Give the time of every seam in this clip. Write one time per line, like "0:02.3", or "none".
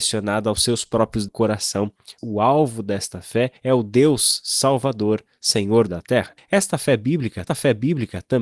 0:01.3
0:02.2
0:03.6
0:05.9
0:06.4
0:07.5